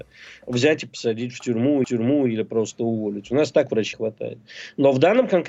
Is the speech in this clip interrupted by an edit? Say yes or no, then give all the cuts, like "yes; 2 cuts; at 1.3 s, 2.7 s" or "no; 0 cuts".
yes; 2 cuts; at 1.8 s, 3.9 s